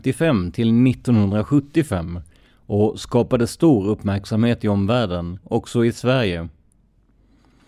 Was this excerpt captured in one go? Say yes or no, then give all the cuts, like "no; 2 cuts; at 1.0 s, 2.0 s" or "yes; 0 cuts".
no; 1 cut; at 5.4 s